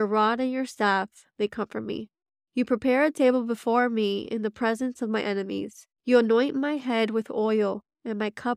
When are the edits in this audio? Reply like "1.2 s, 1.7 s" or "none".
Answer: 6.0 s